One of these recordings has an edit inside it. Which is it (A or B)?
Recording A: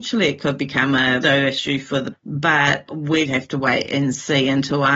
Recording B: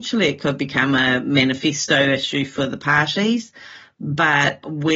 A